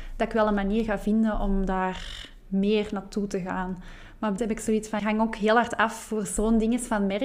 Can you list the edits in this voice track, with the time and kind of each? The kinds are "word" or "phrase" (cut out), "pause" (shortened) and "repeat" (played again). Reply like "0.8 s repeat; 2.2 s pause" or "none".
4.4 s phrase; 5.0 s phrase